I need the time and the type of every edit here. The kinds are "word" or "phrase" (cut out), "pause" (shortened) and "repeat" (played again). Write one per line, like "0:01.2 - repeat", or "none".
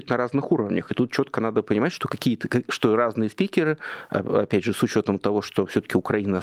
none